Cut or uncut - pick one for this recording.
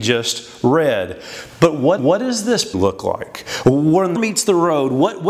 cut